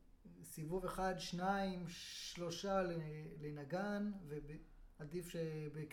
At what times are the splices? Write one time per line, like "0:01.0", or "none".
none